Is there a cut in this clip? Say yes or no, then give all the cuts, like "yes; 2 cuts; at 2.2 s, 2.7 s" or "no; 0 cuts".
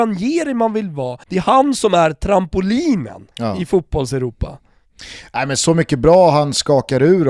yes; 2 cuts; at 1.2 s, 3.3 s